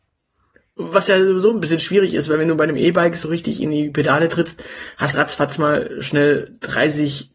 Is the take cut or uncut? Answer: cut